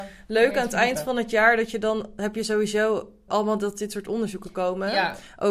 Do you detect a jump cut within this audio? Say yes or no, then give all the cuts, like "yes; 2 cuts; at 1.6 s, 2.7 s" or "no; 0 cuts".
yes; 1 cut; at 3.3 s